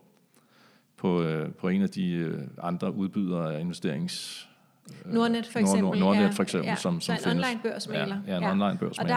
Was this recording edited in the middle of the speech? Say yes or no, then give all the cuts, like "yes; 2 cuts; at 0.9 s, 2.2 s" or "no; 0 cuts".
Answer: no; 0 cuts